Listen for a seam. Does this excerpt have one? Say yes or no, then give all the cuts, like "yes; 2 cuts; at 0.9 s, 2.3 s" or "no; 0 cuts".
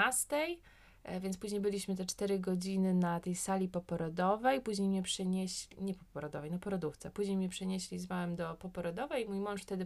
no; 0 cuts